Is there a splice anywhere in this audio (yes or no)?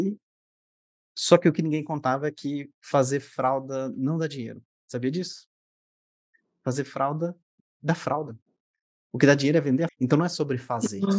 yes